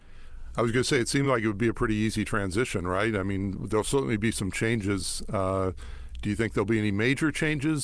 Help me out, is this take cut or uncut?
uncut